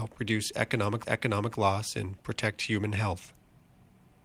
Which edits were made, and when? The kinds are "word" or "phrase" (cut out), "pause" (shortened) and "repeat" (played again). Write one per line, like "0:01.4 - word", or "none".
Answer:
0:01.0 - repeat